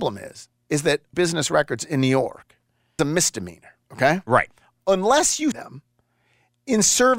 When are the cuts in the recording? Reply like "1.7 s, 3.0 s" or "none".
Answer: 1.1 s, 3.0 s, 3.8 s, 5.5 s